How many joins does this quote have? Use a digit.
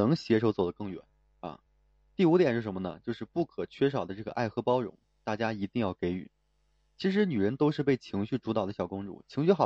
0